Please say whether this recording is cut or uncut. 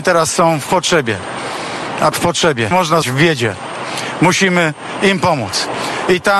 cut